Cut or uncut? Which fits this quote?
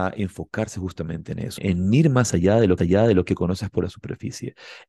cut